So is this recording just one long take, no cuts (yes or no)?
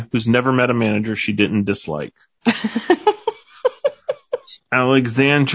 yes